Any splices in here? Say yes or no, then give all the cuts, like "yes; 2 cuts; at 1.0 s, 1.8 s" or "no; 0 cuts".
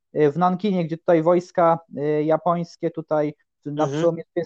no; 0 cuts